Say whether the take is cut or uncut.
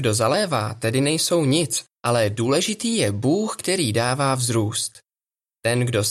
cut